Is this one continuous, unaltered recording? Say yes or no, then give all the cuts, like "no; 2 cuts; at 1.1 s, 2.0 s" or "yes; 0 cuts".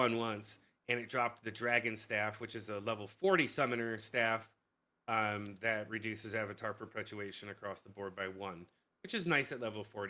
yes; 0 cuts